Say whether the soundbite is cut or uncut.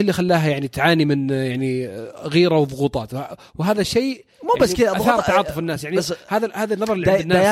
uncut